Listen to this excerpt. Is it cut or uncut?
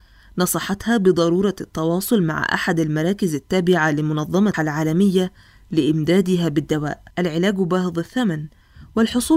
cut